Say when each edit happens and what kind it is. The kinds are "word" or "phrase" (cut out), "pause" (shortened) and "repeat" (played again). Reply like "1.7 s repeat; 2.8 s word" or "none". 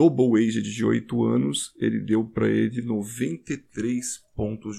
none